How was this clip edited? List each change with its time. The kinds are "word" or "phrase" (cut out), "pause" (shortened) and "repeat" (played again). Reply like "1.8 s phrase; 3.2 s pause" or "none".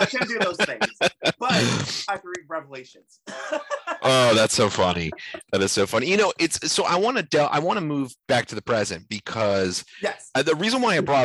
8.2 s pause